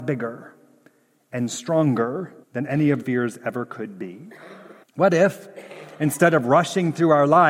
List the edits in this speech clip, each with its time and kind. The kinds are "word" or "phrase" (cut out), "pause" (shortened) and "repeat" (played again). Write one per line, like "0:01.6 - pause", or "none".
0:02.4 - pause
0:03.0 - word
0:04.8 - pause